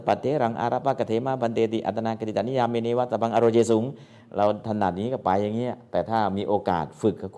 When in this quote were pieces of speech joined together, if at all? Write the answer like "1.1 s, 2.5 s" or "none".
none